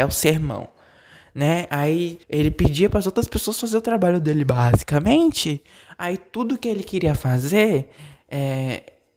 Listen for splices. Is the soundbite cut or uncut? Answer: cut